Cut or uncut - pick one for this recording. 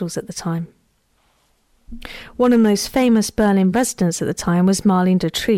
uncut